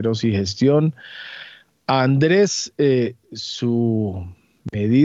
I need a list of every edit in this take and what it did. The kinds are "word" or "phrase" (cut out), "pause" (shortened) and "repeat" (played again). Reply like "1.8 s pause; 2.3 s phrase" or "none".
none